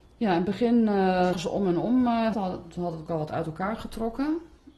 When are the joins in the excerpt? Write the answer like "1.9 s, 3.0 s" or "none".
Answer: 1.3 s, 2.3 s, 3.1 s